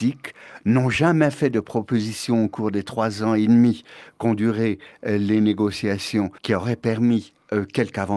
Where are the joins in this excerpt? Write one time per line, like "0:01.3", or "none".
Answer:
0:06.4